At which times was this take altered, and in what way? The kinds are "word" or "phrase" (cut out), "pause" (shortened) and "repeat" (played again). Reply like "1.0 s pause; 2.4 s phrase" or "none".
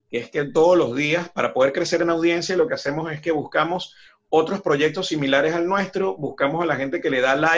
none

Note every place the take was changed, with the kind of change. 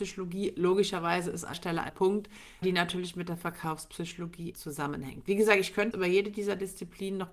1.5 s word; 1.9 s word; 2.6 s word; 4.5 s word; 5.9 s word

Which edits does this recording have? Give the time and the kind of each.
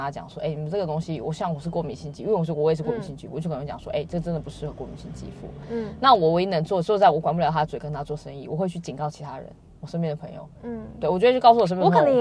10.6 s pause

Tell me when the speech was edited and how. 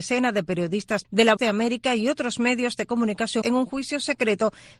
1.0 s word; 1.4 s word; 3.4 s word

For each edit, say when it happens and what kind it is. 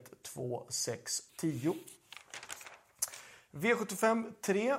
1.3 s word

